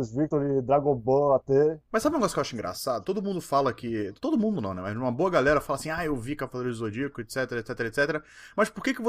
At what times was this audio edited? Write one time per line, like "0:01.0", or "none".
none